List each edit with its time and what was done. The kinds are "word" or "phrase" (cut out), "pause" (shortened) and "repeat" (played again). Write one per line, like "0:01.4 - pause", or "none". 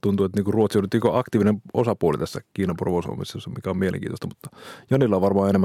none

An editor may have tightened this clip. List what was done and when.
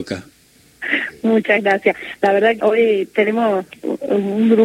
0:02.6 - word

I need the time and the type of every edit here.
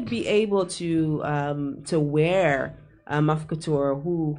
none

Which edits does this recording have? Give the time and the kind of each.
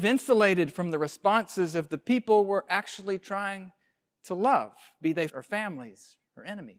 0:05.3 - word

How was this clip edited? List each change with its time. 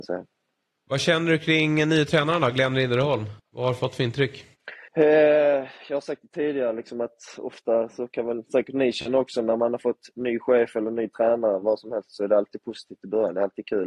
0:03.4 - pause
0:04.9 - pause

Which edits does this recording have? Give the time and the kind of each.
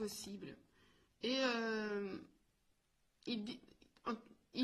none

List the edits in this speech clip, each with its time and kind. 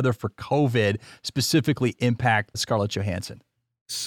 0:02.5 - word

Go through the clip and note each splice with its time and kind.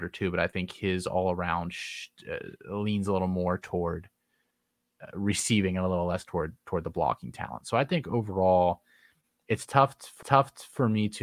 0:10.2 - repeat

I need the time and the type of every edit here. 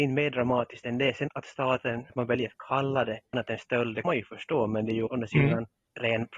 0:01.3 - word
0:02.1 - word
0:03.3 - word
0:04.0 - word
0:05.1 - word

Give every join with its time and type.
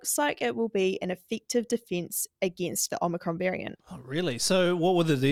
0:03.8 - pause

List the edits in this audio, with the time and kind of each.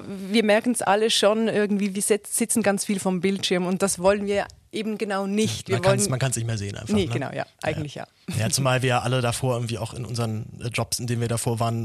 none

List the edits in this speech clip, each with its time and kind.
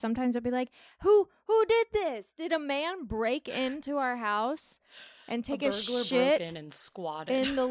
none

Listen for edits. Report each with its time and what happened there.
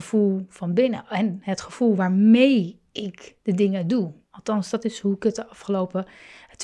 0:03.4 - pause

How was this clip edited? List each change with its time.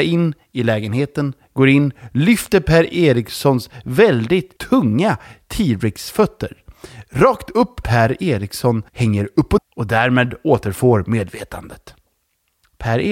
0:04.6 - pause
0:07.8 - phrase
0:08.9 - pause
0:09.6 - word

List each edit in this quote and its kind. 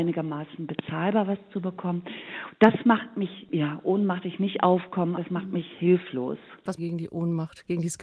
0:04.2 - word
0:05.2 - word
0:06.8 - phrase

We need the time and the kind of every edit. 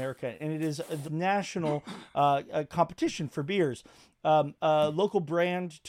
0:01.0 - word

